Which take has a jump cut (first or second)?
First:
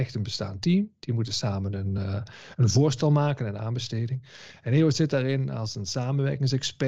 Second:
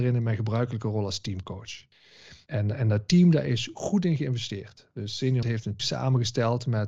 second